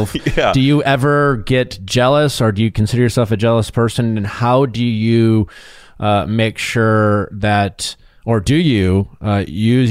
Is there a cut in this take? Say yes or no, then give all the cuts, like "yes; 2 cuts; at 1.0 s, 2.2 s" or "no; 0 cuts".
no; 0 cuts